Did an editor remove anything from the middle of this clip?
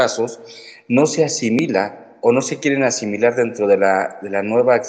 no; 0 cuts

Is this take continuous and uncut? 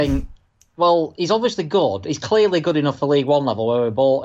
yes; 0 cuts

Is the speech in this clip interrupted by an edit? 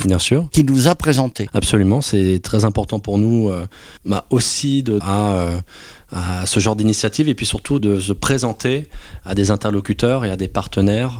yes; 3 cuts; at 4.0 s, 5.0 s, 7.8 s

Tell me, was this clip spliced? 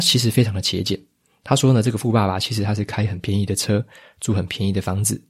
no; 0 cuts

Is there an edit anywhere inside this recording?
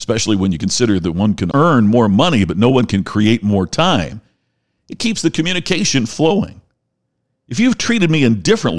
yes; 1 cut; at 1.5 s

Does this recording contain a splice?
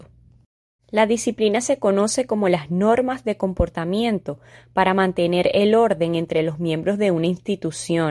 no; 0 cuts

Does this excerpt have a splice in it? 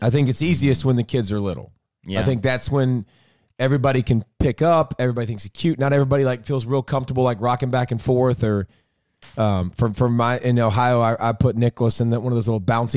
no; 0 cuts

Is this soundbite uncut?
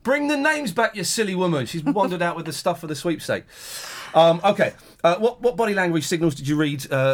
yes; 0 cuts

